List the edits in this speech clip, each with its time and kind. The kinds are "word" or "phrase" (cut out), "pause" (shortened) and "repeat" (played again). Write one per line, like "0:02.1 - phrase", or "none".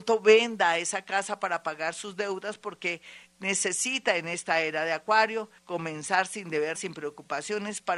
0:05.6 - pause
0:06.7 - word